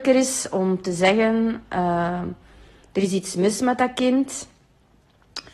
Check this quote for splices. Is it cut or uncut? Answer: uncut